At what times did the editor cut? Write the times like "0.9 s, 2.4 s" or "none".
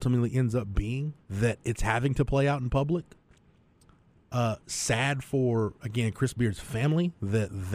1.2 s